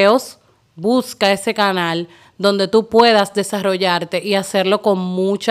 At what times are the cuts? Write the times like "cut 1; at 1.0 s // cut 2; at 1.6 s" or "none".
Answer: none